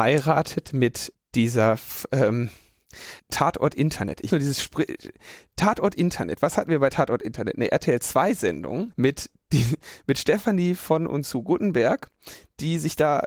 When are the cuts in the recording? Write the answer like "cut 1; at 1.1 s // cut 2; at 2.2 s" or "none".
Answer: cut 1; at 1.1 s // cut 2; at 3.2 s // cut 3; at 4.3 s // cut 4; at 8.9 s